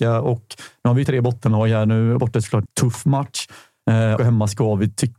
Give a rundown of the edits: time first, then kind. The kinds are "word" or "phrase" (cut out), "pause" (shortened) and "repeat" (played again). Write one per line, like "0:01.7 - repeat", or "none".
0:01.0 - word
0:02.2 - word
0:02.7 - word
0:04.2 - word